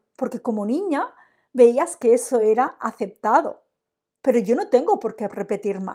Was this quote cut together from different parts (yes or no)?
no